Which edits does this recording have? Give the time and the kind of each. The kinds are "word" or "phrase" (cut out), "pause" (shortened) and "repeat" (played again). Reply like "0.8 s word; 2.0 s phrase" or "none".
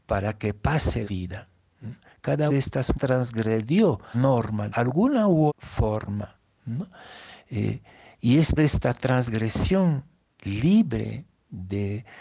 1.0 s word; 2.5 s word; 2.9 s word; 4.1 s word; 4.7 s word; 5.5 s word; 8.6 s word